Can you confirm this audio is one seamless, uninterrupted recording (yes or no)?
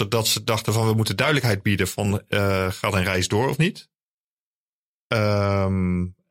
yes